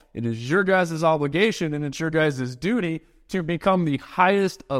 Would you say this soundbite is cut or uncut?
uncut